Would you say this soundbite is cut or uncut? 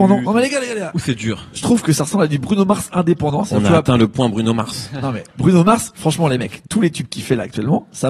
cut